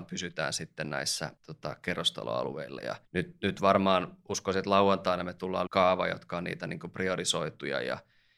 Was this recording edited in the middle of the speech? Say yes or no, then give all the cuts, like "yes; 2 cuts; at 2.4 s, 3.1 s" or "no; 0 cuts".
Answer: yes; 3 cuts; at 1.4 s, 3.0 s, 5.7 s